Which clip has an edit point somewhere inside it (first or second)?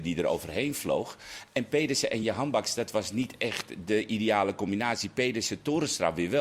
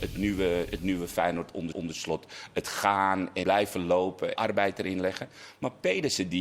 second